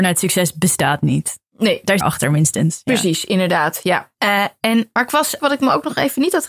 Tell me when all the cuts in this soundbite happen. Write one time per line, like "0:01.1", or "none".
0:01.5
0:02.0
0:04.1
0:05.0
0:05.4